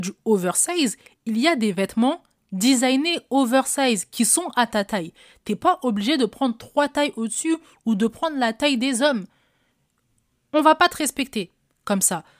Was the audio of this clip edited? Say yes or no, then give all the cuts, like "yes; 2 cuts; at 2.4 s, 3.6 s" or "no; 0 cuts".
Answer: no; 0 cuts